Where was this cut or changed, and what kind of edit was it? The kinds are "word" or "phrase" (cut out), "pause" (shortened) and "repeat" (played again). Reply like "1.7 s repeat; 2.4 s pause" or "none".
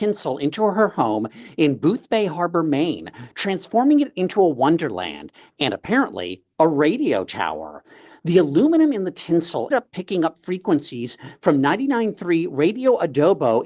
9.7 s word